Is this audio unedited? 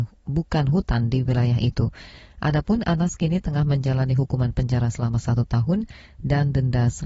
yes; 0 cuts

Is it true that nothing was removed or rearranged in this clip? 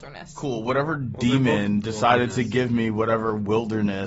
yes; 0 cuts

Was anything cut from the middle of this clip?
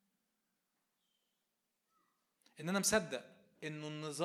no; 0 cuts

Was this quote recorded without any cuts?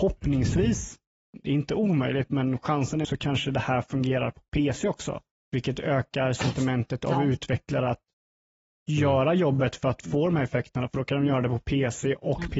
no; 2 cuts; at 3.0 s, 5.4 s

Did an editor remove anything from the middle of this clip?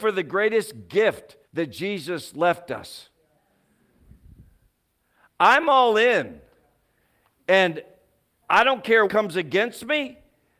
yes; 3 cuts; at 1.4 s, 8.4 s, 9.1 s

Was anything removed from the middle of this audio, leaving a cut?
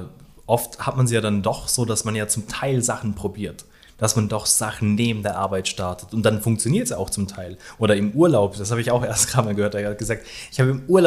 no; 0 cuts

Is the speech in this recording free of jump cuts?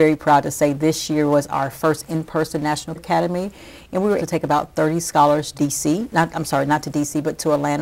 no; 3 cuts; at 3.0 s, 4.2 s, 5.5 s

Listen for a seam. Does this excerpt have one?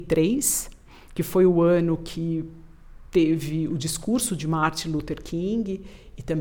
no; 0 cuts

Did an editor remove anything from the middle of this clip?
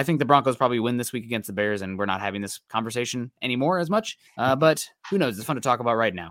yes; 1 cut; at 4.3 s

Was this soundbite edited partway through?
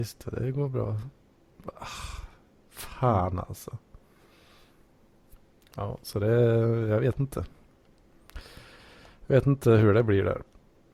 no; 0 cuts

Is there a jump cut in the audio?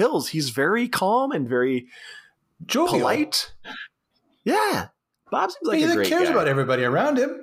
no; 0 cuts

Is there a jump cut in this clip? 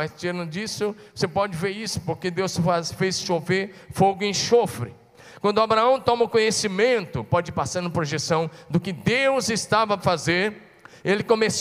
yes; 1 cut; at 10.0 s

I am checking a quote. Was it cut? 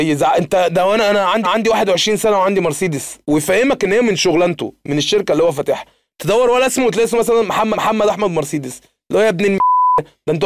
yes; 3 cuts; at 1.4 s, 3.2 s, 7.7 s

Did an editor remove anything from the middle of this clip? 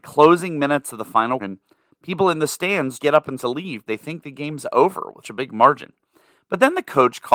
yes; 5 cuts; at 1.4 s, 3.0 s, 3.4 s, 3.9 s, 5.2 s

